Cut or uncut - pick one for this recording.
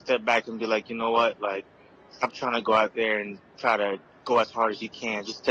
uncut